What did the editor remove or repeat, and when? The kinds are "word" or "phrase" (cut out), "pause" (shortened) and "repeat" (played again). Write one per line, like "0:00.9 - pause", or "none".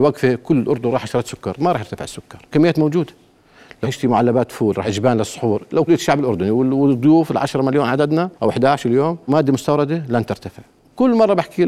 0:02.5 - word
0:03.8 - word
0:04.8 - word
0:05.9 - word
0:08.3 - pause
0:09.3 - word